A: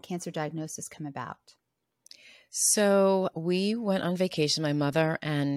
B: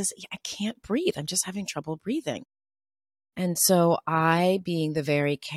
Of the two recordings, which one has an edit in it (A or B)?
A